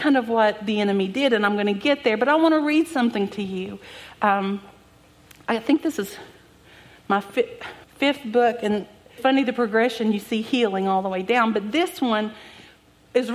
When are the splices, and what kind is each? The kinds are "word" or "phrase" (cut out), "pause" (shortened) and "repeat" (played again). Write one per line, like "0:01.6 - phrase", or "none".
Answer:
0:07.8 - pause
0:09.2 - word